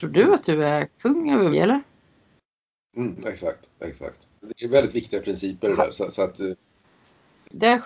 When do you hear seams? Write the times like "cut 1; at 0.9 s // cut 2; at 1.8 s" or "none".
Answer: cut 1; at 1.5 s // cut 2; at 4.4 s